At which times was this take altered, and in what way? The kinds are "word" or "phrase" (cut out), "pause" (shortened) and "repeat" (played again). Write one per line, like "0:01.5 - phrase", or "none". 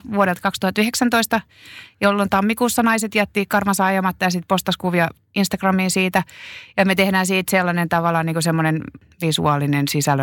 none